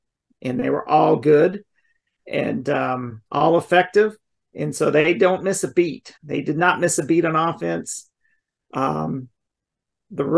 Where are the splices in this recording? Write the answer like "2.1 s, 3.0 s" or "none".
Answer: 3.3 s, 6.2 s